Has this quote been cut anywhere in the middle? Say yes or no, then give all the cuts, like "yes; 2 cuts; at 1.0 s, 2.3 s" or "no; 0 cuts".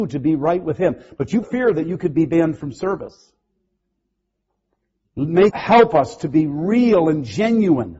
yes; 2 cuts; at 1.4 s, 5.5 s